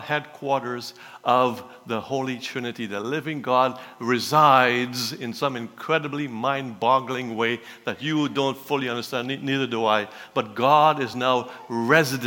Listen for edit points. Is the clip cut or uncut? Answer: uncut